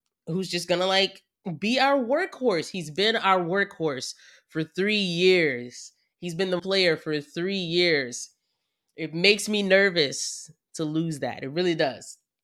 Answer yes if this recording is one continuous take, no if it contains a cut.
no